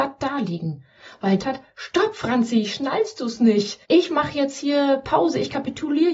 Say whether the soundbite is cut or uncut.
cut